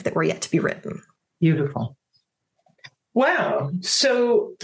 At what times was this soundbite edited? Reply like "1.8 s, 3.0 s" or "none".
1.2 s

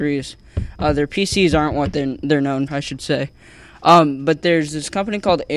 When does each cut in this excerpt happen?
2.7 s

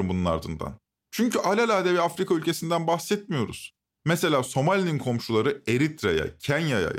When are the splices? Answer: none

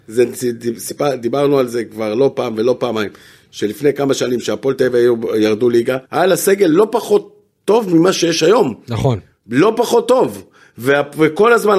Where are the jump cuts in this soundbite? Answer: 6.1 s

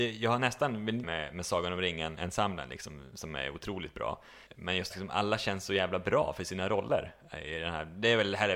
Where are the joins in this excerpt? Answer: 1.0 s, 4.5 s, 4.9 s

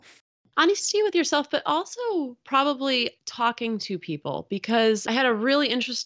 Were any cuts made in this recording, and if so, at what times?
none

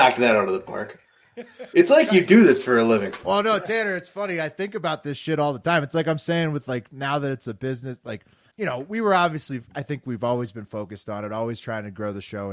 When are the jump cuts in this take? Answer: 8.5 s

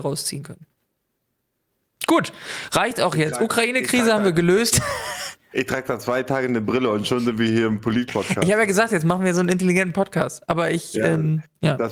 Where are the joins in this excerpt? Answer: none

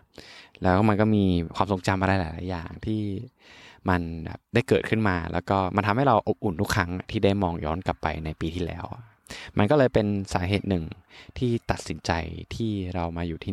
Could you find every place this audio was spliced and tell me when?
4.4 s

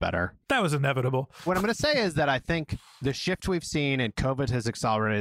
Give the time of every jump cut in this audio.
none

